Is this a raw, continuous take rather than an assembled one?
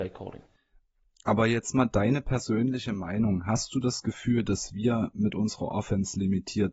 yes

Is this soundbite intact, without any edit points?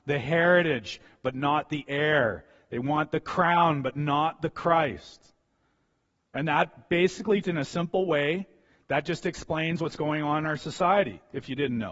no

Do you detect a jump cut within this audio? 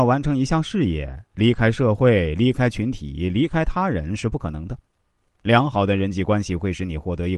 no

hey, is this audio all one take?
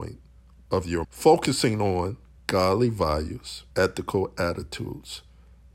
no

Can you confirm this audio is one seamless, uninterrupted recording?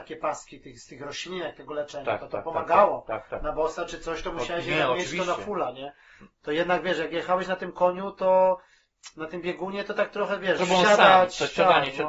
no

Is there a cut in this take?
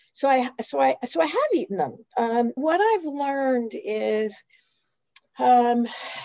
yes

